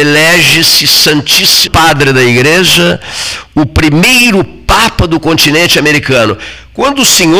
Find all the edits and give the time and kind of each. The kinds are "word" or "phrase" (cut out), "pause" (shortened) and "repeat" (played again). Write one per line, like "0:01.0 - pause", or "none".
0:01.7 - word